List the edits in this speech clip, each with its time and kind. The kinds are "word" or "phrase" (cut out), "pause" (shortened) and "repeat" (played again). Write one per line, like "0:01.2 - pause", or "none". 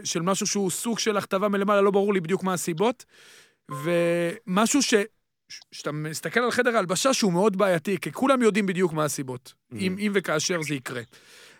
none